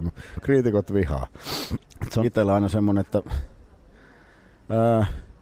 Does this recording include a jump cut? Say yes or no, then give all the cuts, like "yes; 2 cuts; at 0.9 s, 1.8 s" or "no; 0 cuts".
yes; 2 cuts; at 1.8 s, 2.2 s